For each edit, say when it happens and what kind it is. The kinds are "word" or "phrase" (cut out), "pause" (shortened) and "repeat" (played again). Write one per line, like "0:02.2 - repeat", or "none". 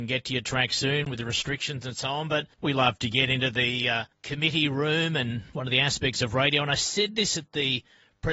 0:02.5 - pause
0:04.1 - pause